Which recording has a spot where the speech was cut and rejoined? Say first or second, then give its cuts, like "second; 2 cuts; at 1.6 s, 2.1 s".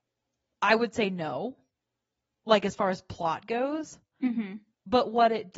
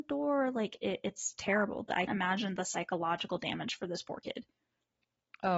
second; 1 cut; at 2.1 s